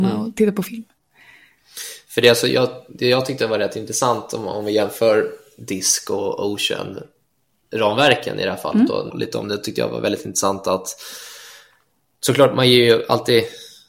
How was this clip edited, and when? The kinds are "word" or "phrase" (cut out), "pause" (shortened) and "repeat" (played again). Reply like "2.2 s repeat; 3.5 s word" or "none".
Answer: 9.1 s phrase